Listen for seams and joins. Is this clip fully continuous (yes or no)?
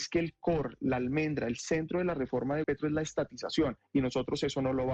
no